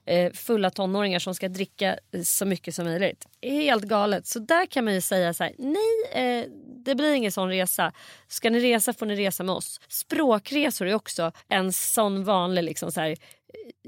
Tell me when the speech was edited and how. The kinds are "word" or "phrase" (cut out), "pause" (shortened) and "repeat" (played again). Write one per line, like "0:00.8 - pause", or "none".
0:09.8 - pause
0:11.4 - pause